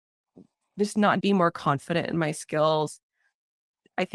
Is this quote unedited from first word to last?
no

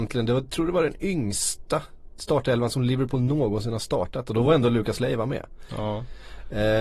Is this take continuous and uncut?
yes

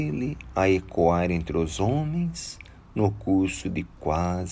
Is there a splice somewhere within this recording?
no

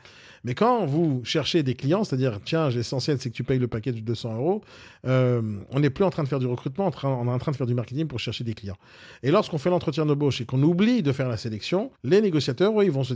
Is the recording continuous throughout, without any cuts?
no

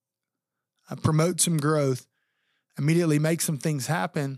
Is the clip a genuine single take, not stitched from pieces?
yes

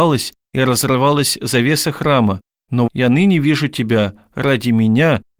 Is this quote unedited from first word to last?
no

